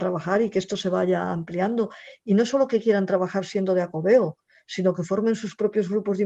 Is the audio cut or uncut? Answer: uncut